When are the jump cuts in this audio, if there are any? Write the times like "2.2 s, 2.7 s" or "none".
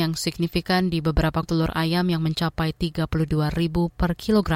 1.4 s